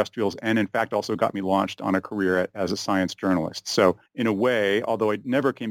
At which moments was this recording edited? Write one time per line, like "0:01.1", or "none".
0:04.1